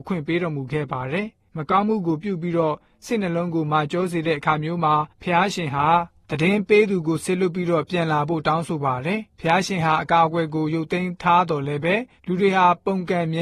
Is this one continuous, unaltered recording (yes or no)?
yes